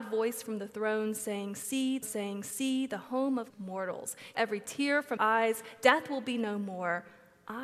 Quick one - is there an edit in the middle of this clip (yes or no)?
yes